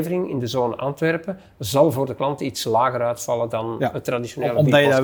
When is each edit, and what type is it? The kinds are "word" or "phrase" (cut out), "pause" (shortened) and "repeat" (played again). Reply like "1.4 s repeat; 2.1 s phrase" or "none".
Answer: none